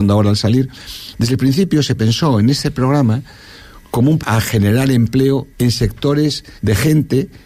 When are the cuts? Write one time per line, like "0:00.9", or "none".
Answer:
0:04.2
0:05.5
0:06.6